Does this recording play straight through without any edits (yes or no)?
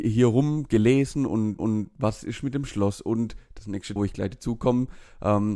no